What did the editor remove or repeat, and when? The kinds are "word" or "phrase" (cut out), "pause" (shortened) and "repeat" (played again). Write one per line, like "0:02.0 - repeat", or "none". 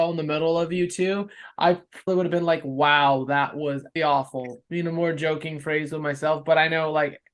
0:02.1 - word
0:04.0 - word